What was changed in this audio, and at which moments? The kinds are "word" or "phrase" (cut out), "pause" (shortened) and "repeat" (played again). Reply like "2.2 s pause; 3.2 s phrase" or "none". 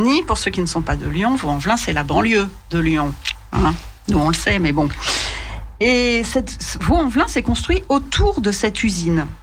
none